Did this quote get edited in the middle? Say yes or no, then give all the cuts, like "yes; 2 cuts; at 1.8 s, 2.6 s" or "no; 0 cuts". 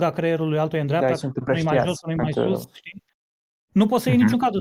no; 0 cuts